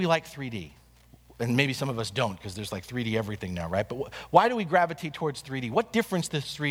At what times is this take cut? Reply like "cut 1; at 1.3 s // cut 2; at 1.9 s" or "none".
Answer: none